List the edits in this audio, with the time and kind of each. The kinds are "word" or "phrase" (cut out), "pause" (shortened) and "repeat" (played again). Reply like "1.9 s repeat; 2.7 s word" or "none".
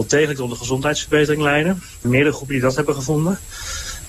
2.0 s word